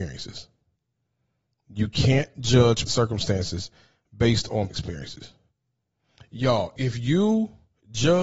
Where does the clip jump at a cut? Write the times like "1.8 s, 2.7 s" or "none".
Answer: 2.9 s, 4.7 s, 6.8 s